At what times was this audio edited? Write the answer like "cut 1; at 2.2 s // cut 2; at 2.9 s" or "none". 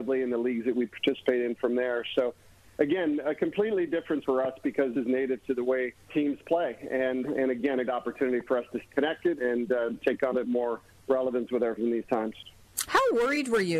cut 1; at 4.2 s // cut 2; at 4.9 s // cut 3; at 6.1 s // cut 4; at 7.2 s // cut 5; at 7.9 s // cut 6; at 8.8 s // cut 7; at 9.4 s // cut 8; at 10.3 s // cut 9; at 11.8 s